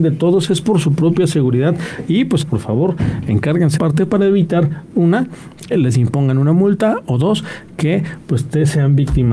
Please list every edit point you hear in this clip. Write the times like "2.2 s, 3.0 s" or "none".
2.4 s, 3.8 s, 5.7 s